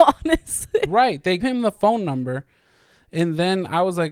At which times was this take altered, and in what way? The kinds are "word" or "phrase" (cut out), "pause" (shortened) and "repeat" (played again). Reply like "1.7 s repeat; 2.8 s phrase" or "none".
1.4 s word